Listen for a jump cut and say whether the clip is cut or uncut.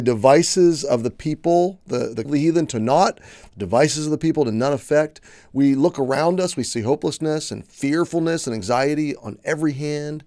cut